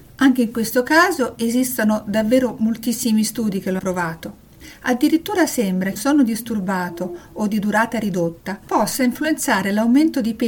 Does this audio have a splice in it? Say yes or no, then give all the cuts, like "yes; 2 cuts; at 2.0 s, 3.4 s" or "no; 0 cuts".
yes; 2 cuts; at 3.8 s, 6.0 s